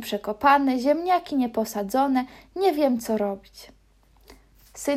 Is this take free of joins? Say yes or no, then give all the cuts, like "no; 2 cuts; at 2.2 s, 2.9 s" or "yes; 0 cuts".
yes; 0 cuts